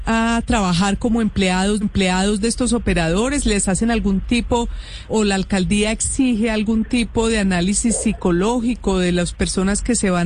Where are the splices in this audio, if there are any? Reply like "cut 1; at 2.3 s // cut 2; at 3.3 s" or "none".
cut 1; at 1.8 s // cut 2; at 5.1 s